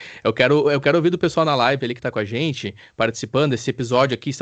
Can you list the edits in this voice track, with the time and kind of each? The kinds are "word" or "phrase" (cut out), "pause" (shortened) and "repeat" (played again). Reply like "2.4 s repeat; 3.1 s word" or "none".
none